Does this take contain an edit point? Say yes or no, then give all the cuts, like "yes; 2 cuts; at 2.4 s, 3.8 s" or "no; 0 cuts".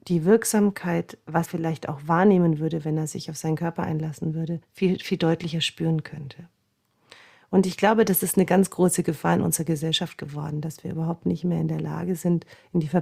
yes; 2 cuts; at 1.4 s, 4.6 s